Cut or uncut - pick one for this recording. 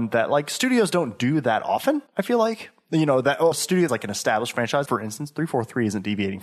cut